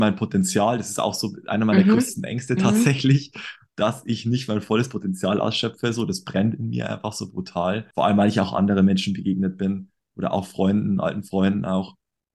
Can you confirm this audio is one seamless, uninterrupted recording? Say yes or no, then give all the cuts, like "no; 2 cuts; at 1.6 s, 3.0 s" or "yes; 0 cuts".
no; 1 cut; at 7.9 s